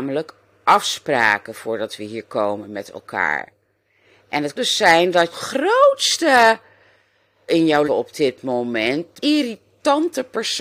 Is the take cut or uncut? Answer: cut